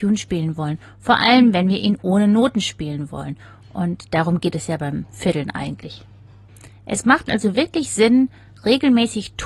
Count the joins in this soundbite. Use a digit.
0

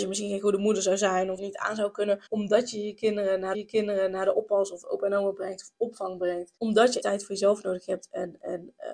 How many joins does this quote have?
5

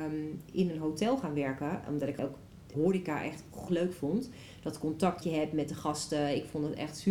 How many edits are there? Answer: 4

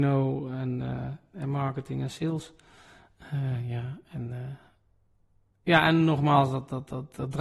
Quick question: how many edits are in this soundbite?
1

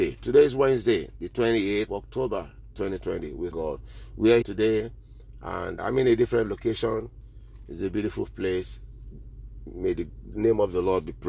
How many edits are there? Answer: 4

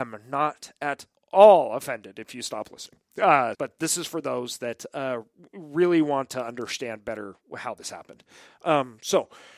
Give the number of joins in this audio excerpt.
2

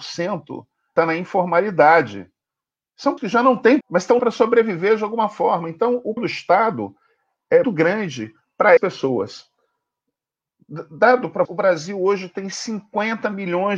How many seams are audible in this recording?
8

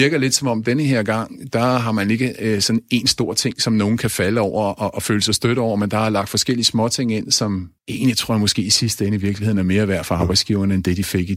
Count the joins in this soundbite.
1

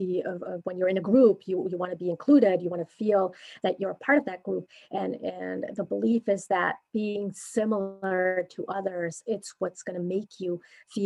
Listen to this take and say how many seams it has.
1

